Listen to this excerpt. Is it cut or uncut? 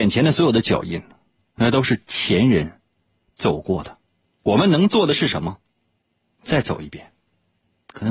uncut